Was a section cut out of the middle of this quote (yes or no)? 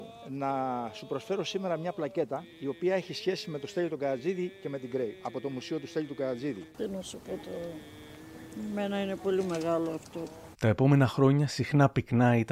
yes